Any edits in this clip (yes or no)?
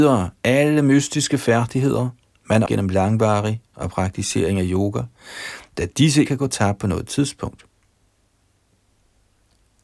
yes